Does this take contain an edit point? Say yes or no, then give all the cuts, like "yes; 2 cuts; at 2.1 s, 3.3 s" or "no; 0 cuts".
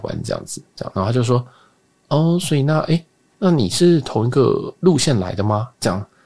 no; 0 cuts